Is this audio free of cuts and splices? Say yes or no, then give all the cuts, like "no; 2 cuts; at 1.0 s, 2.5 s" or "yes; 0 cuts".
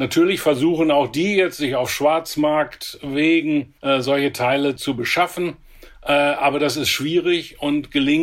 no; 1 cut; at 3.8 s